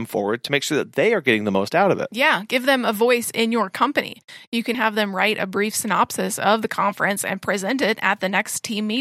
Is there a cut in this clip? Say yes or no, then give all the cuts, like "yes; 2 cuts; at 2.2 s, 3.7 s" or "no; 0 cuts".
yes; 1 cut; at 4.7 s